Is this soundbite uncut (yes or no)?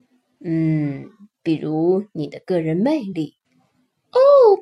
no